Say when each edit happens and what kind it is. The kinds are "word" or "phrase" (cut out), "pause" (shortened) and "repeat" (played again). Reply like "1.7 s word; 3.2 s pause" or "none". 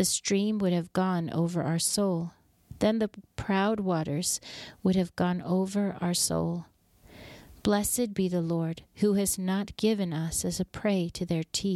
none